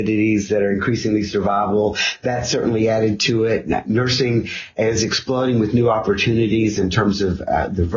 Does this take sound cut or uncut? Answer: uncut